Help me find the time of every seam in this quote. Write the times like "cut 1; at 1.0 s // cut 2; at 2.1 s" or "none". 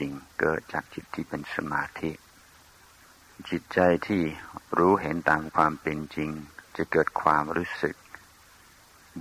cut 1; at 6.7 s